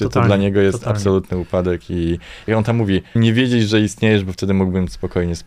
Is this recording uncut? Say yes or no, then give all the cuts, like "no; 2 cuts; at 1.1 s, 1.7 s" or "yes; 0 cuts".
no; 2 cuts; at 2.5 s, 3.2 s